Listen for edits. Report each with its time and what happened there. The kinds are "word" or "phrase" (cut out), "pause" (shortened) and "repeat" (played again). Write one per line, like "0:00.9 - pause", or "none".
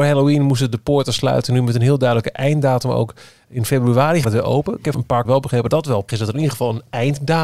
0:04.2 - word
0:04.9 - word
0:05.2 - word
0:05.7 - word
0:06.1 - word

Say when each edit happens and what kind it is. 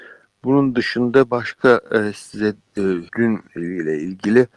0:03.1 - pause

